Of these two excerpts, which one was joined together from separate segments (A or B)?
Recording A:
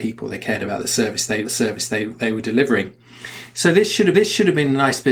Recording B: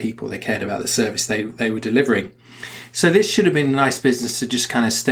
A